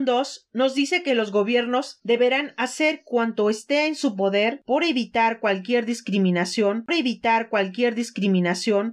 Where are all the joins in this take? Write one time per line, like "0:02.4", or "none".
0:06.9